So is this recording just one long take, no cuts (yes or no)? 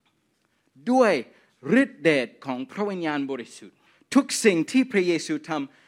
no